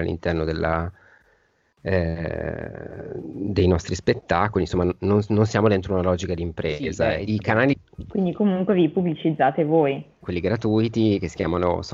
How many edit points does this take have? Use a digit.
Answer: 1